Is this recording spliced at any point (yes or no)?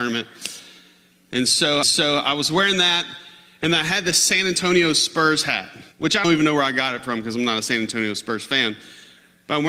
yes